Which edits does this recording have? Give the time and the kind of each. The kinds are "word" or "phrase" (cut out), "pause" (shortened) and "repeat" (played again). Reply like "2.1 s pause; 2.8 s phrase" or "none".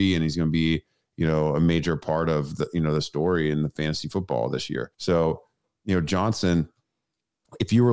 4.9 s pause

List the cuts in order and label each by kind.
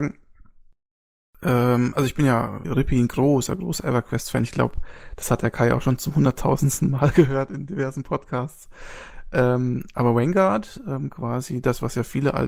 2.6 s phrase

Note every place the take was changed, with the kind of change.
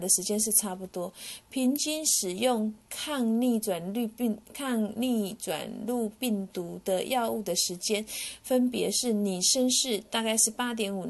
4.4 s pause

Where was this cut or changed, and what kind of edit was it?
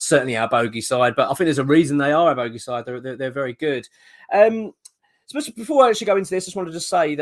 none

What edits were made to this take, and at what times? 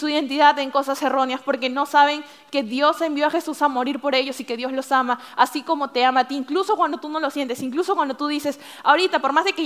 none

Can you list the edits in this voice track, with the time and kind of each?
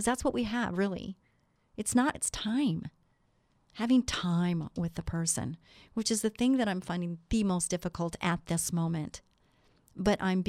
2.1 s word

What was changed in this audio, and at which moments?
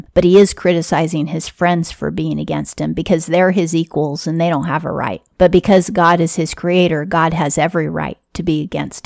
none

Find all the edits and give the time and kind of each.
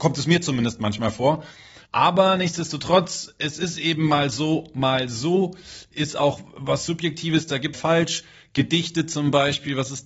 1.8 s pause; 7.7 s phrase

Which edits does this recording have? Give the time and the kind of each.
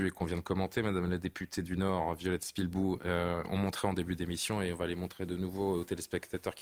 none

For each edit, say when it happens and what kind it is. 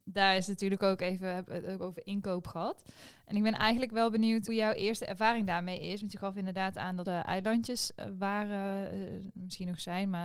4.5 s word; 7.1 s phrase

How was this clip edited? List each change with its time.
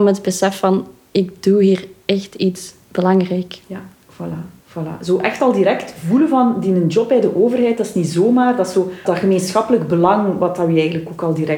9.1 s word

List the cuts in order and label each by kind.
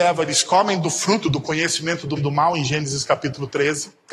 2.2 s word

